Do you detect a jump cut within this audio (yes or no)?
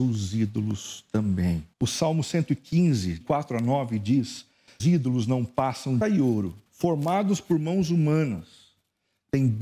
yes